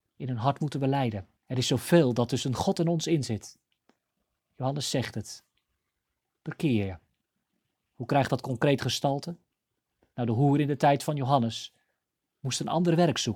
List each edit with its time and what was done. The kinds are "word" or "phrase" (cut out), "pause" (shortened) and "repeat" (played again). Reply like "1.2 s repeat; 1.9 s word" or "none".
1.4 s pause

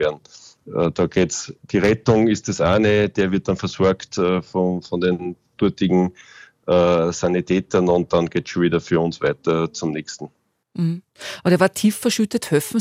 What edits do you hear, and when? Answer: none

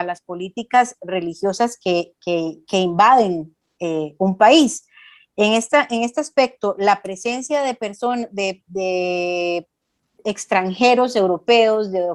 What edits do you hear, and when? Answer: none

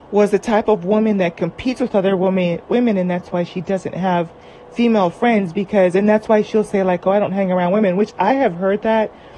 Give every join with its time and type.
none

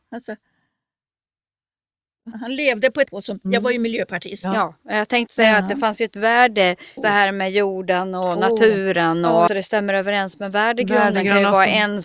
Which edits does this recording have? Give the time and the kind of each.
2.3 s word; 3.1 s phrase; 5.3 s word; 7.0 s word; 9.5 s phrase

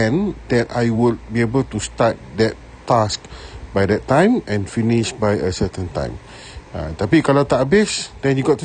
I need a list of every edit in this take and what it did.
none

